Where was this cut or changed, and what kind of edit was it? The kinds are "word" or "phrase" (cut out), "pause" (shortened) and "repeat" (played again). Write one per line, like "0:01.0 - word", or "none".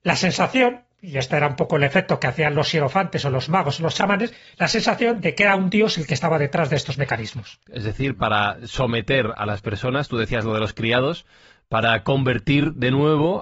none